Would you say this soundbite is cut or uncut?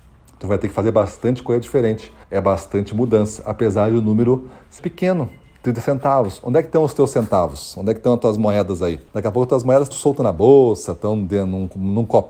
cut